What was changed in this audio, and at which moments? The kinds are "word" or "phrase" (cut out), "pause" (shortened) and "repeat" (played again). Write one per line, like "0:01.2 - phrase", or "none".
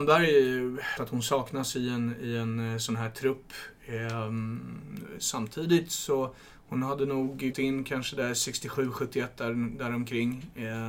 0:01.0 - phrase
0:07.5 - word